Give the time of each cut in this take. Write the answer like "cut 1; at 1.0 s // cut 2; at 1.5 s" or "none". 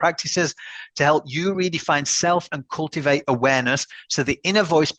none